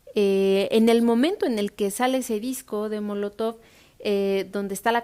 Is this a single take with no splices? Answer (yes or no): yes